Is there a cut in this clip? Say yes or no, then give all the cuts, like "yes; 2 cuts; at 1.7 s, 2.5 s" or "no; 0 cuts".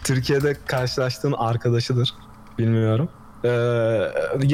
yes; 1 cut; at 1.4 s